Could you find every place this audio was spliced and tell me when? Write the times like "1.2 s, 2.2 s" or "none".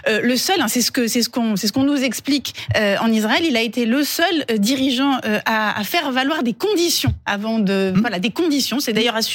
none